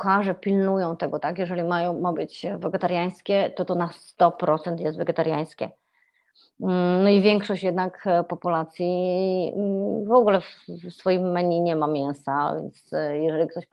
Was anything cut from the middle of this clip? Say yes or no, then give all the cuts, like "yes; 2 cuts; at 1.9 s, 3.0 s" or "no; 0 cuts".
no; 0 cuts